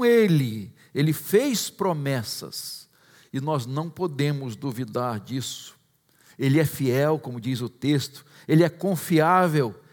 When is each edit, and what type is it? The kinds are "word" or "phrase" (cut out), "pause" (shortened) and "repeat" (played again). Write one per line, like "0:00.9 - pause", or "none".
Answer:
none